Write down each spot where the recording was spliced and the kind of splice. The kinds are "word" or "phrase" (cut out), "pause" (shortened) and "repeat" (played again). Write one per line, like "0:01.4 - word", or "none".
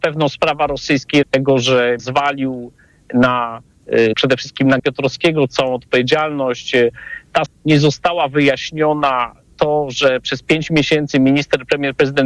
0:01.2 - word
0:02.0 - word
0:04.1 - word
0:04.8 - word
0:07.5 - word
0:09.5 - word

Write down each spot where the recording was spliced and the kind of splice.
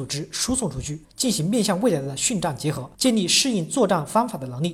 0:01.0 - pause
0:02.9 - pause

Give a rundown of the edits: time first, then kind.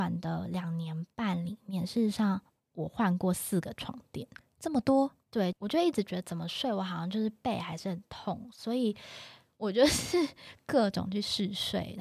0:05.2 - pause

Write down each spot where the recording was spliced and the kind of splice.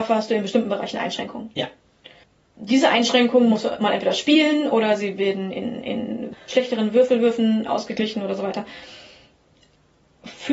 none

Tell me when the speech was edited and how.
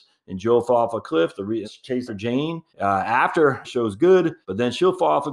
0:01.6 - phrase
0:02.1 - word
0:02.7 - pause
0:03.6 - phrase
0:04.4 - pause

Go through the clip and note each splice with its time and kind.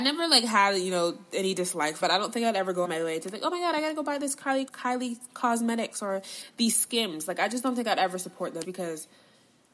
0:02.0 - word
0:02.8 - word
0:04.7 - word
0:08.6 - word

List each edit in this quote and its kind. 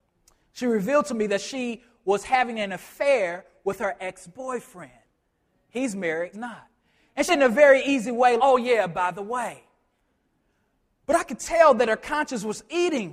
0:06.3 - word
0:07.3 - word
0:08.4 - word

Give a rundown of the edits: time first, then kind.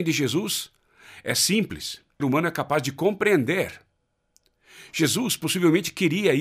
0:02.2 - phrase

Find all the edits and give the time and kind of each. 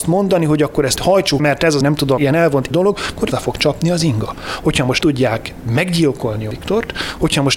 0:01.0 - word
0:01.4 - word
0:01.8 - word
0:02.2 - word
0:02.7 - phrase
0:03.3 - word
0:05.0 - word
0:06.5 - word

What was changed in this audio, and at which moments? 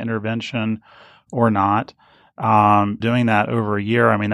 0:03.0 - word

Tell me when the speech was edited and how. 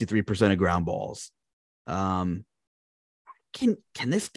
none

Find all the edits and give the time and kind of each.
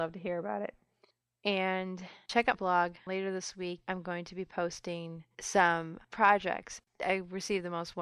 0:02.5 - word

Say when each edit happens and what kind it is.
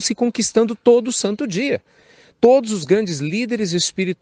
none

